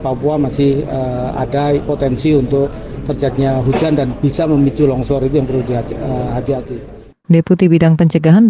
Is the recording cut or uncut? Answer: cut